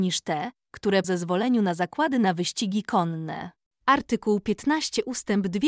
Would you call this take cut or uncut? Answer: cut